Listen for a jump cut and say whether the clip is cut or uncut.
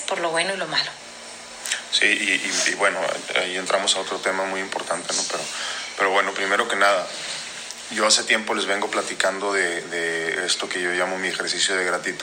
uncut